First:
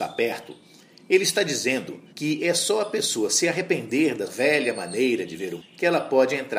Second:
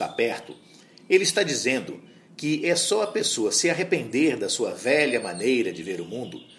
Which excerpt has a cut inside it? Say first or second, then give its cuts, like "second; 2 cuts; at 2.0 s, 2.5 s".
first; 3 cuts; at 2.1 s, 4.3 s, 5.6 s